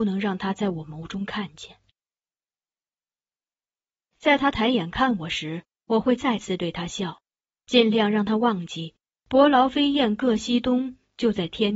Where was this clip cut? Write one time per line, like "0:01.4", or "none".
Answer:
none

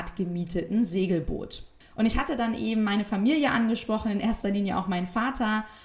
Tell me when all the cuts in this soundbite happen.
none

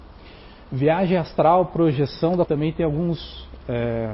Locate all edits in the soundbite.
0:02.5

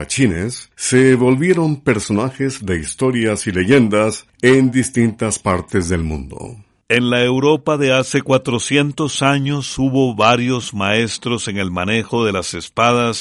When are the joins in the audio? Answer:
0:02.6

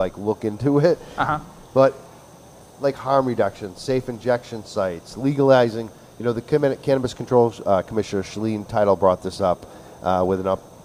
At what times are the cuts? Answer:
none

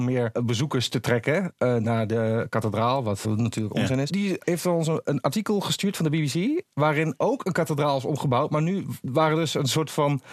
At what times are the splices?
0:03.2

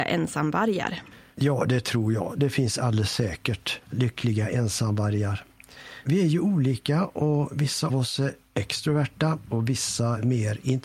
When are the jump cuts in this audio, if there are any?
0:07.9

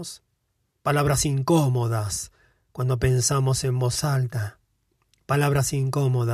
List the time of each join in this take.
none

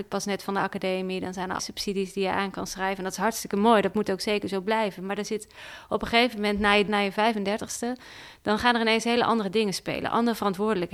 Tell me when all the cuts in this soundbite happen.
0:01.6
0:06.9

